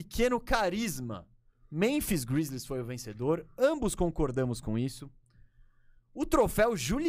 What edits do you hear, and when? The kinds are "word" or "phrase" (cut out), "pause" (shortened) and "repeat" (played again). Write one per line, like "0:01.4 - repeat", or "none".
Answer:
none